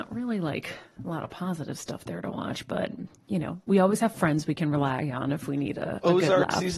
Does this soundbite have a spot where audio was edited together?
no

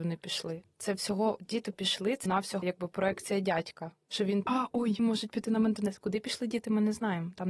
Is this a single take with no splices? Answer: no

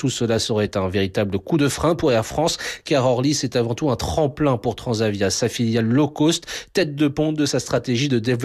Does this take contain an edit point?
no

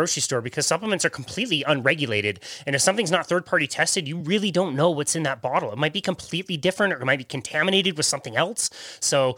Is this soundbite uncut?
yes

